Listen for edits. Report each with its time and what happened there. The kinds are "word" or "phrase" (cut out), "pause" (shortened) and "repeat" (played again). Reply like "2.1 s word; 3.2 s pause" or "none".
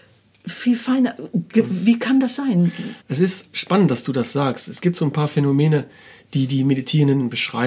3.0 s pause; 3.5 s word